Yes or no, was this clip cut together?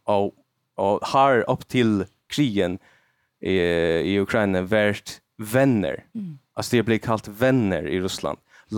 no